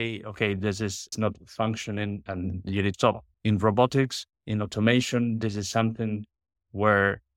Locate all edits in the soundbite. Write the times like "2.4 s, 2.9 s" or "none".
1.1 s, 2.3 s, 2.9 s, 3.3 s, 4.3 s